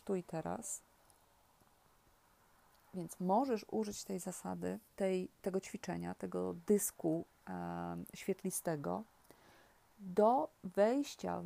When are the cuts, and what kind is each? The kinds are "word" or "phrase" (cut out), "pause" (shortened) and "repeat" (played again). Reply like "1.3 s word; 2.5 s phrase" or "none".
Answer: none

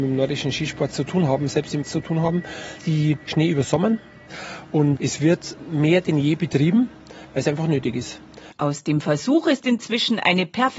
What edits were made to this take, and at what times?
1.8 s word; 2.8 s word; 5.0 s word

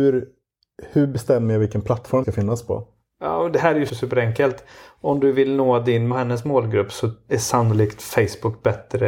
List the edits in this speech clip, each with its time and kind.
2.2 s word; 3.9 s word; 6.1 s word

